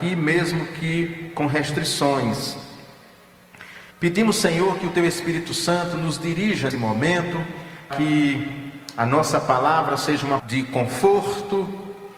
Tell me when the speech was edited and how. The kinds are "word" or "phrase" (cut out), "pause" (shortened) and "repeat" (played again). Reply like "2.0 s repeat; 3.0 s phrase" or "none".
3.9 s pause; 6.7 s word; 7.9 s word; 10.4 s word